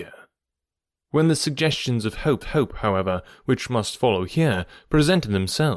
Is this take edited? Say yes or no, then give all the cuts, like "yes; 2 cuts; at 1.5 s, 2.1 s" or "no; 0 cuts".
yes; 1 cut; at 2.4 s